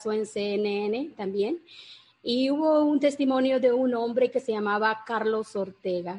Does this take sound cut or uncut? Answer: uncut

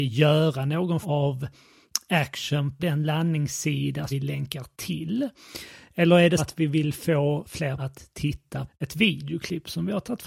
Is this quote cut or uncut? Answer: cut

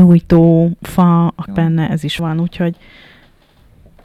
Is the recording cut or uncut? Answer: cut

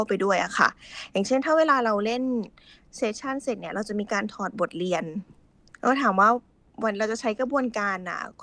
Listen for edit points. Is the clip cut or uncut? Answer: uncut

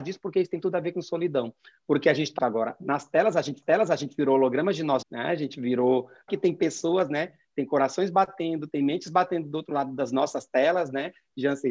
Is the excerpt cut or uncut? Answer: cut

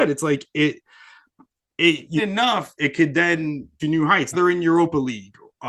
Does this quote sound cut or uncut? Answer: cut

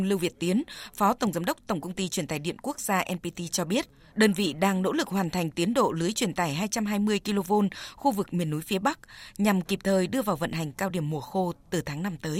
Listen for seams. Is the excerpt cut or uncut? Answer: uncut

